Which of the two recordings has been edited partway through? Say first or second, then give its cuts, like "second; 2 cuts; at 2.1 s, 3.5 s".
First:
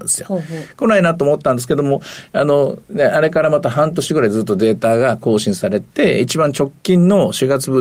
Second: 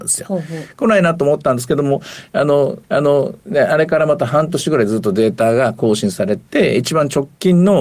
second; 1 cut; at 2.8 s